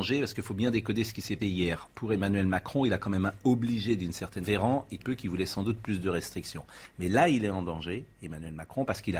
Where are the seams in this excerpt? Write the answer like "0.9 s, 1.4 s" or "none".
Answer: 1.4 s, 1.9 s, 4.4 s, 5.0 s

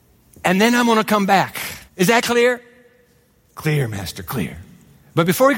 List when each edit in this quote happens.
1.9 s

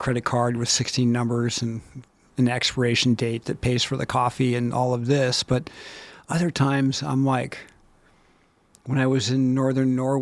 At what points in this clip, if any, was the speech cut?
none

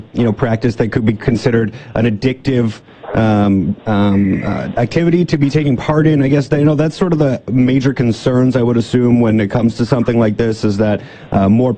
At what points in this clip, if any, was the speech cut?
3.8 s

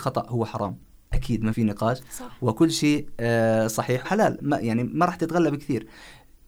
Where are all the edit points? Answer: 1.5 s, 4.0 s

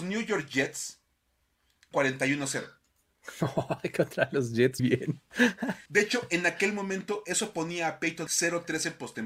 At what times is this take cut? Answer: 1.9 s, 4.8 s, 5.9 s, 8.3 s

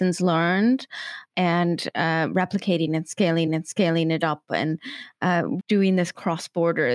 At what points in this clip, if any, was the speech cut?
1.3 s, 3.5 s, 5.6 s

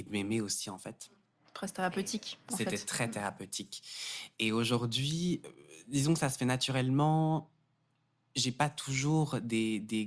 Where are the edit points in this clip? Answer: none

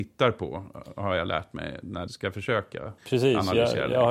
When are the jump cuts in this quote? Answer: 2.1 s, 3.0 s

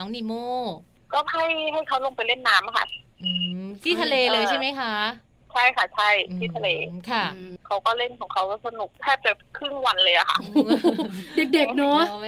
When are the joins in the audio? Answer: 8.9 s

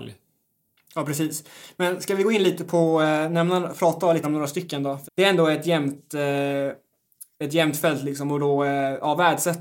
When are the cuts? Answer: 4.2 s, 5.0 s

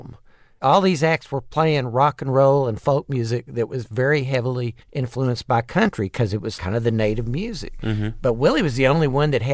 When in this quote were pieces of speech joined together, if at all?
4.8 s, 6.6 s

